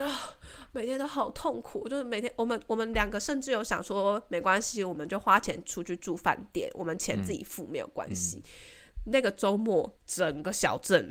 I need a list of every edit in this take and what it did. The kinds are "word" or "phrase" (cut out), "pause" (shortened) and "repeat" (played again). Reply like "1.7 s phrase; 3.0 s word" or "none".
10.0 s pause

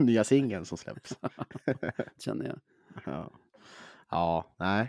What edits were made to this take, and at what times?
2.2 s phrase

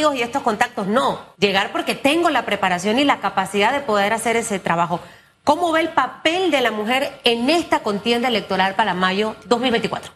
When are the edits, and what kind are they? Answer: 1.3 s pause

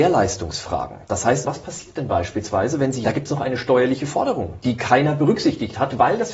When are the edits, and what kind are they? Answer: 1.4 s word; 3.0 s phrase

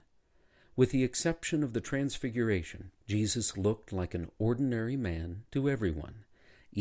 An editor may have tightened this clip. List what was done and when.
3.0 s pause; 5.5 s pause

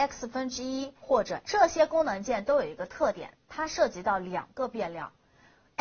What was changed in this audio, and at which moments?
1.0 s word; 1.4 s word

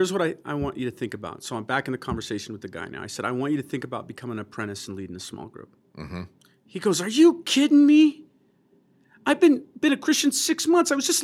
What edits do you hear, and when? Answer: none

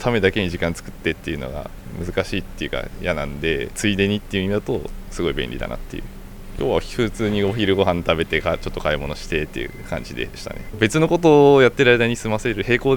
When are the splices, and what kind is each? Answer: 3.7 s phrase

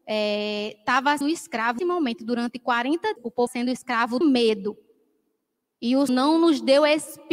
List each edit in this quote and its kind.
1.2 s word; 1.8 s word; 3.2 s word; 3.5 s word; 4.2 s word; 6.1 s word

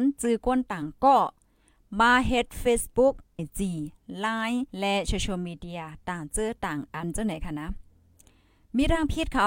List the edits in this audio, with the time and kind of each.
3.4 s word; 4.7 s pause

